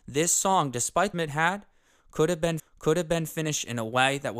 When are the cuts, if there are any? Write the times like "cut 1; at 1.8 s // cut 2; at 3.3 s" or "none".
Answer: cut 1; at 1.1 s // cut 2; at 2.6 s